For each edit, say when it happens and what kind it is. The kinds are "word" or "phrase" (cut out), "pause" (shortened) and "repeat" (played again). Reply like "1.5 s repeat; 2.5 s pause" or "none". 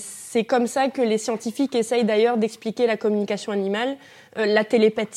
none